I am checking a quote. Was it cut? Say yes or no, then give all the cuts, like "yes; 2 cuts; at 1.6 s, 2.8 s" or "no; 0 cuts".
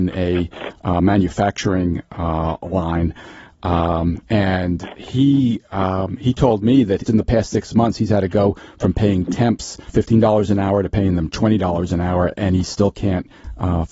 yes; 2 cuts; at 7.1 s, 9.9 s